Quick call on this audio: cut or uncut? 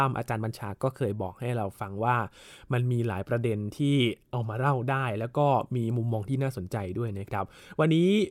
uncut